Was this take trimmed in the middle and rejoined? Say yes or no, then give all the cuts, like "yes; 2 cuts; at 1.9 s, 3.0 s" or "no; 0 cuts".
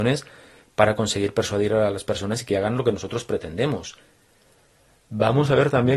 no; 0 cuts